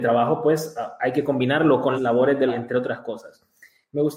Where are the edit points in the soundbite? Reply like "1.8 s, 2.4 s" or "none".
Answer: 2.0 s, 2.5 s